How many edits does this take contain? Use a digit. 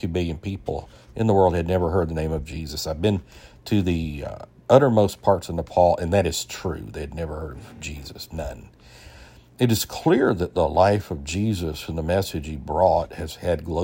0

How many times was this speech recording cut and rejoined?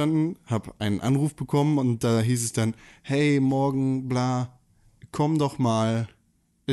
0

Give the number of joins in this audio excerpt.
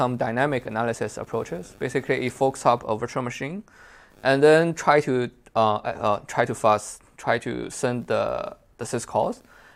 0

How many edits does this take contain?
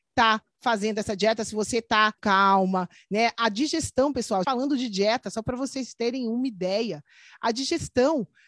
2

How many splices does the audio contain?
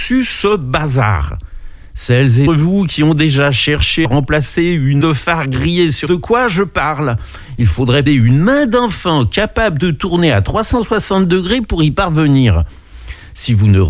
5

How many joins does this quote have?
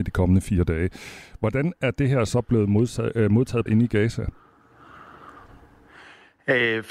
1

